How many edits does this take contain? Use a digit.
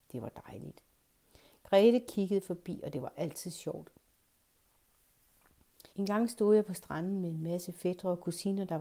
1